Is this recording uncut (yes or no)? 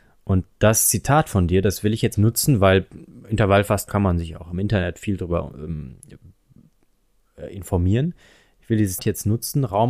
no